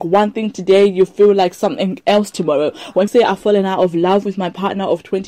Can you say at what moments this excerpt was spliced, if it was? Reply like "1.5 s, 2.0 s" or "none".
3.1 s